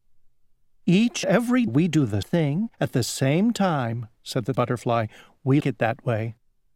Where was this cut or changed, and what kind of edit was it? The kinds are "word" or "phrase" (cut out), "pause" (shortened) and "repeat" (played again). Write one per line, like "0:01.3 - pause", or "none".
0:01.2 - word
0:01.7 - word
0:02.2 - word
0:02.7 - pause
0:04.2 - pause
0:04.5 - word
0:05.6 - word